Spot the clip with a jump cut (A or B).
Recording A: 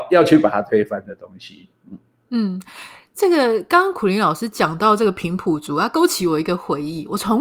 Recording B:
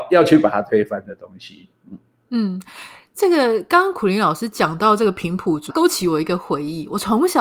B